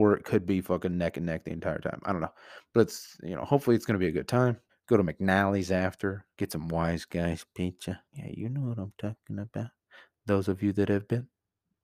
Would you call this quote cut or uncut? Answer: cut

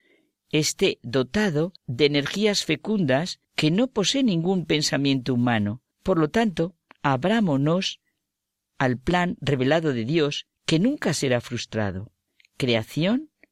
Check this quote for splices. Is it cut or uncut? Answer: cut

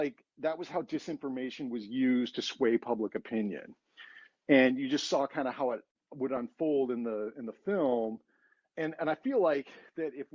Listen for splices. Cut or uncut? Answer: uncut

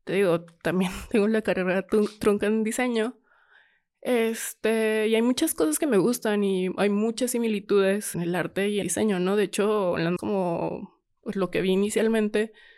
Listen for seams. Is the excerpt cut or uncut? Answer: cut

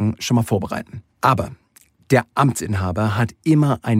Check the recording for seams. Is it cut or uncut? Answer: cut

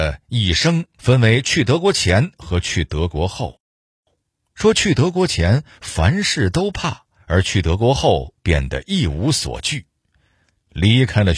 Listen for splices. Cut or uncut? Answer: cut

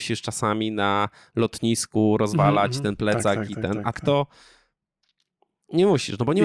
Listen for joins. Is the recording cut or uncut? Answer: cut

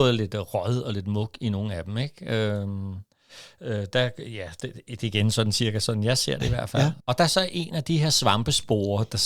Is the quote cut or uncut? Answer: cut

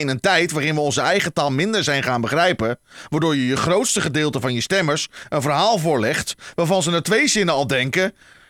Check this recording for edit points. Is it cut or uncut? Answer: uncut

